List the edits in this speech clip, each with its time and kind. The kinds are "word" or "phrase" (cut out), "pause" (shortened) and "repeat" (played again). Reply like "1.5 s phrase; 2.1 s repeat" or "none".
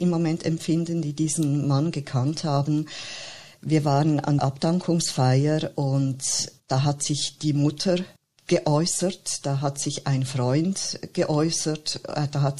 4.4 s word; 6.6 s pause; 8.2 s pause